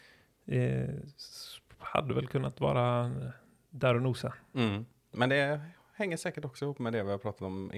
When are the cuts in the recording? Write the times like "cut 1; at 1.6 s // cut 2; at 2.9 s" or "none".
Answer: none

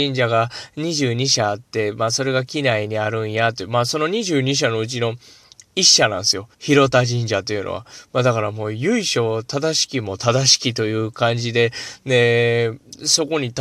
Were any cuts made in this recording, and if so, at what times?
cut 1; at 6.5 s

